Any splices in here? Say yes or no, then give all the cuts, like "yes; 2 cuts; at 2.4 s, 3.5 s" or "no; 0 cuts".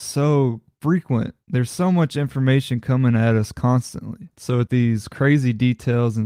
yes; 2 cuts; at 4.3 s, 4.7 s